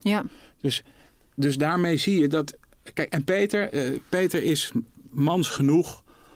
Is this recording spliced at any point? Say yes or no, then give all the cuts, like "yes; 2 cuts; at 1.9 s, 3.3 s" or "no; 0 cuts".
no; 0 cuts